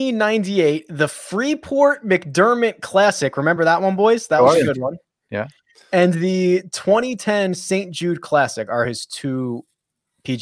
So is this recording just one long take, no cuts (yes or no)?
yes